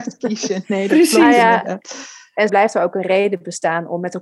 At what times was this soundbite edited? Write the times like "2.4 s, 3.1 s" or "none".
2.5 s